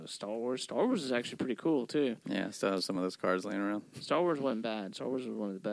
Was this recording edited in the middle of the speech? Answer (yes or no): no